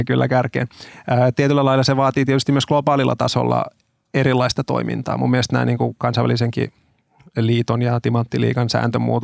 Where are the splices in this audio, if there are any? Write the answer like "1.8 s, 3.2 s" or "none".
none